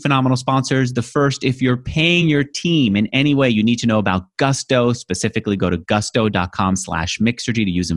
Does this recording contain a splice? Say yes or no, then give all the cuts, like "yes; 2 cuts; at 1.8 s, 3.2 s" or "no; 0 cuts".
no; 0 cuts